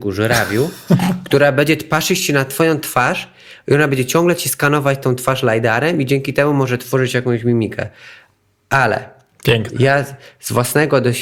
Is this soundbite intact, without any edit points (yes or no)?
yes